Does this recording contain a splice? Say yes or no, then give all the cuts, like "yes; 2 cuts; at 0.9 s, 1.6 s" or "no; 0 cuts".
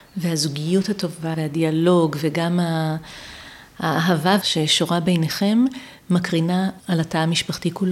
yes; 3 cuts; at 1.3 s, 4.4 s, 6.8 s